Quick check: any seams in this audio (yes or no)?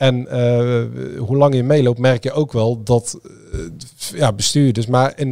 no